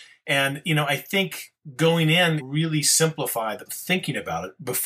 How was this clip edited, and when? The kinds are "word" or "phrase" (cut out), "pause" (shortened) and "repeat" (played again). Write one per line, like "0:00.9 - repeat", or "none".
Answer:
0:02.4 - phrase
0:03.7 - word

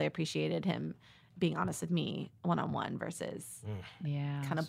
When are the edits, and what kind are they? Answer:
none

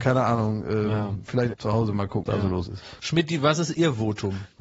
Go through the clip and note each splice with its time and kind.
0:01.5 - word
0:02.2 - word

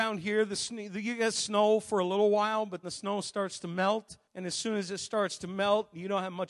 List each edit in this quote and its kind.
0:02.8 - word
0:04.2 - pause

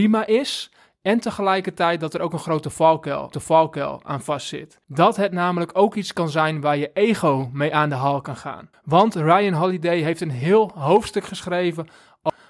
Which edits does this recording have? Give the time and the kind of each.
0:03.3 - repeat
0:04.8 - pause
0:08.7 - pause

